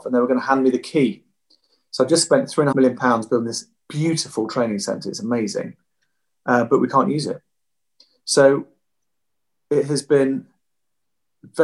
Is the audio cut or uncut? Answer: cut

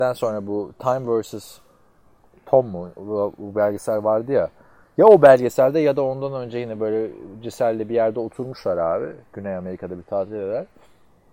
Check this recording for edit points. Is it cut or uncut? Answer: uncut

